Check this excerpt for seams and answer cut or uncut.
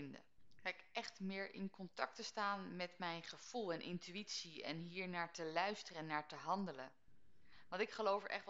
uncut